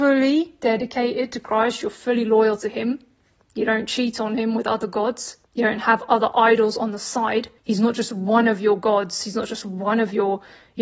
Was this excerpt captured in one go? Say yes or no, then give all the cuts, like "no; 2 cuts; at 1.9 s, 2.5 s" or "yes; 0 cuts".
no; 2 cuts; at 5.4 s, 7.6 s